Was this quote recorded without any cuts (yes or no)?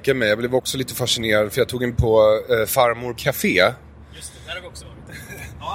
no